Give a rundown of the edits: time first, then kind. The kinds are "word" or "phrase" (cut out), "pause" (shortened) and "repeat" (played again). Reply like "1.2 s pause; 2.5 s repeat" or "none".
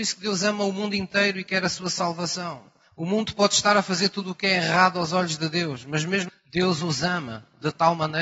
6.3 s word